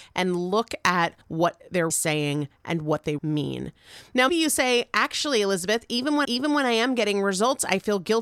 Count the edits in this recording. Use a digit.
5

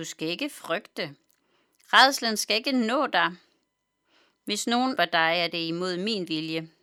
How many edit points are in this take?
1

